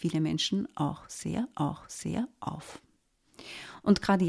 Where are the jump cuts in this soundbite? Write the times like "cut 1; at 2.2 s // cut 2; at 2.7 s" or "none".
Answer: cut 1; at 1.5 s